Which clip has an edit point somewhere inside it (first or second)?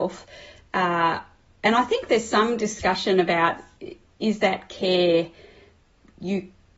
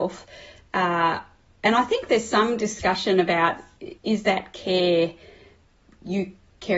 second